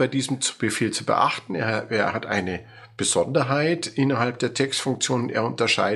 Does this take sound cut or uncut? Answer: uncut